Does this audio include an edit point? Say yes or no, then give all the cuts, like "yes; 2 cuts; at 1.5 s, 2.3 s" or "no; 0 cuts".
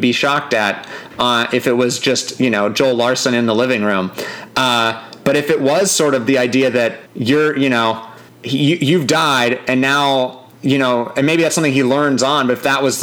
yes; 3 cuts; at 7.1 s, 8.3 s, 10.5 s